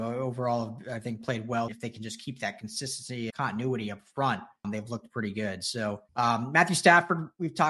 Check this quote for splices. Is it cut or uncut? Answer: cut